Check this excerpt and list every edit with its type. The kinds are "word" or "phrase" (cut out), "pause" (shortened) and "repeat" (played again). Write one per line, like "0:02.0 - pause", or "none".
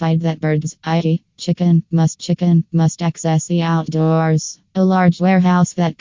0:02.2 - repeat
0:04.7 - pause